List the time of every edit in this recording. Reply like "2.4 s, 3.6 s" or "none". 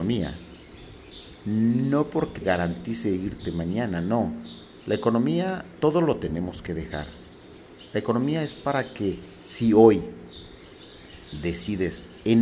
2.4 s, 5.8 s